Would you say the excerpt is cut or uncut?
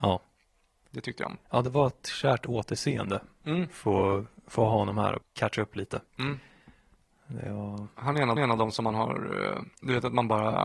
cut